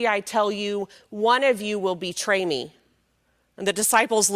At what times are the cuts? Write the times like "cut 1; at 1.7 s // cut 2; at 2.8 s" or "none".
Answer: none